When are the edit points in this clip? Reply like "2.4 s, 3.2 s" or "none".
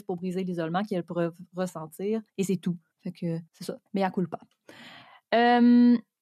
2.3 s, 2.9 s, 3.5 s, 3.9 s